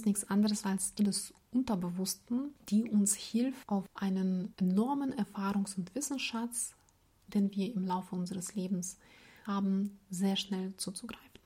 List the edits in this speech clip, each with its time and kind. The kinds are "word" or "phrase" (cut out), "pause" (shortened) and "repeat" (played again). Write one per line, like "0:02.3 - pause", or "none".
0:01.0 - word
0:09.5 - word

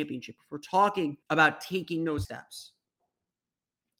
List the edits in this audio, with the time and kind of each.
0:01.2 - pause
0:02.2 - word

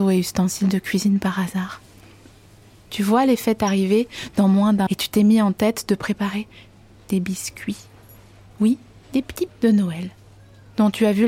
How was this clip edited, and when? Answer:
0:04.9 - word
0:09.5 - word

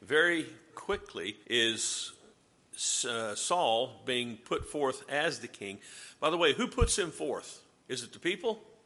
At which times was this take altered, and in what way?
0:01.4 - pause
0:07.8 - pause

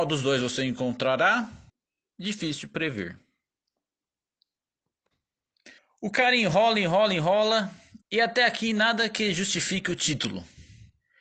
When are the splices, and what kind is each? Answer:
0:01.7 - pause
0:05.8 - pause
0:08.0 - pause

